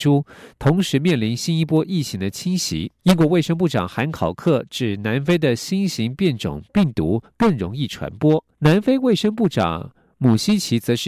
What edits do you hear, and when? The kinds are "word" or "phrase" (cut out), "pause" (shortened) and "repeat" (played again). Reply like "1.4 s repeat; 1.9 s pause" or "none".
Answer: 3.0 s pause; 8.5 s pause